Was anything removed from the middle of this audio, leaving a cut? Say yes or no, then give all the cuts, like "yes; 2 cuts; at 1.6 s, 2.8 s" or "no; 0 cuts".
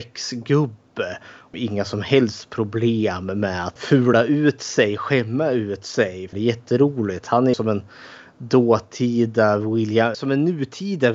yes; 5 cuts; at 1.5 s, 3.8 s, 6.3 s, 7.5 s, 10.1 s